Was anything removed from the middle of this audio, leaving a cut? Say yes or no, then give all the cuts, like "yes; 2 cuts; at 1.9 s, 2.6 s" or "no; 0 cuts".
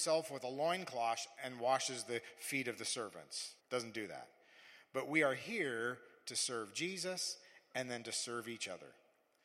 yes; 1 cut; at 3.6 s